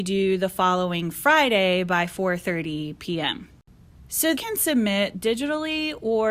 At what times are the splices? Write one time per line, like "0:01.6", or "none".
0:04.3
0:05.1

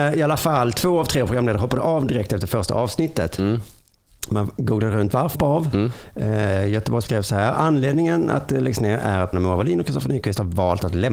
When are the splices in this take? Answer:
0:05.3
0:07.1
0:09.3

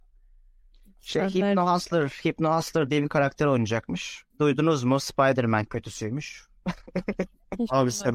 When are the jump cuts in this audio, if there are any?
0:04.3

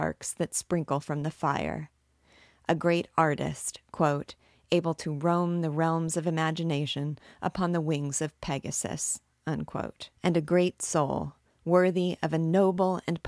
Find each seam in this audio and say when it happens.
0:10.1

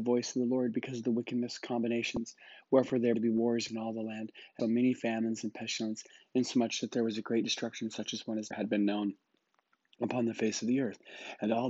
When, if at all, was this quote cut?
0:03.1
0:03.7
0:04.6
0:08.5

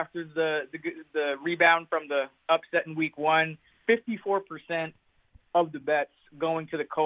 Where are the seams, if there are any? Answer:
none

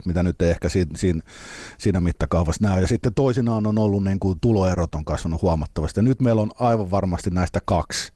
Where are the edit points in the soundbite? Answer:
none

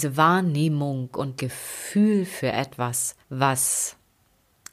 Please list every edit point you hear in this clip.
0:01.4
0:03.2

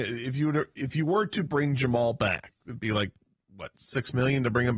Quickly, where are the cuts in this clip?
none

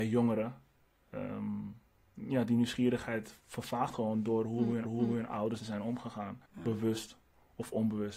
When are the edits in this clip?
0:02.0
0:04.8
0:05.6
0:06.5

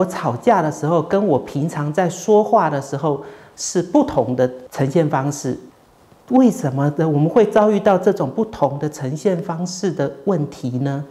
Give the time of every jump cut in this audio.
none

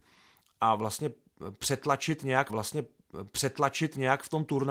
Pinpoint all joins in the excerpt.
0:02.5

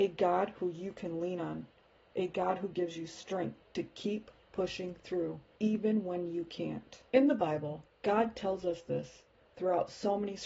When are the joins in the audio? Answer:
none

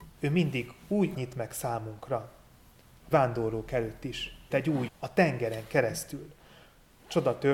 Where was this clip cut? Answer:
0:01.1
0:03.1
0:04.5
0:04.9

